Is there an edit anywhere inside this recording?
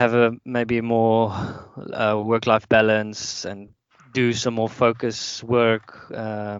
no; 0 cuts

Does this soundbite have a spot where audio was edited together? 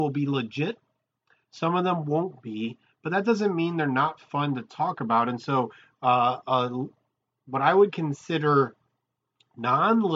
no; 0 cuts

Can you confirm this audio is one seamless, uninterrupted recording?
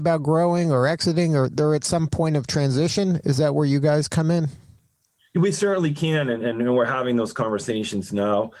yes; 0 cuts

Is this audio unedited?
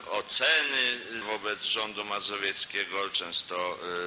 no; 1 cut; at 1.2 s

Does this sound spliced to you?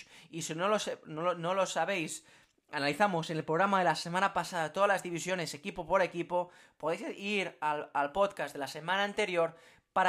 no; 0 cuts

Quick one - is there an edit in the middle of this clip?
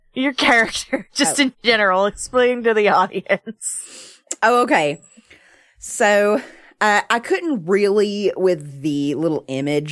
yes; 1 cut; at 1.1 s

